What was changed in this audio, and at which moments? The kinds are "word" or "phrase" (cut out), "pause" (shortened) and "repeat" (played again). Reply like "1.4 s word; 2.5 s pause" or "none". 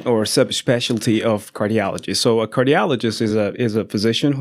none